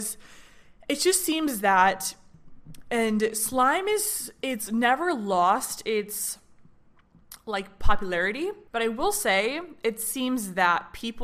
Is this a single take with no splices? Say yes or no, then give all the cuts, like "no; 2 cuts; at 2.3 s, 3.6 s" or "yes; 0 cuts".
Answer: no; 1 cut; at 8.7 s